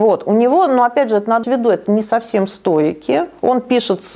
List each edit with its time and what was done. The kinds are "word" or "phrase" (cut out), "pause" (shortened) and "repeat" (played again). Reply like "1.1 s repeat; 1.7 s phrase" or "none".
1.4 s word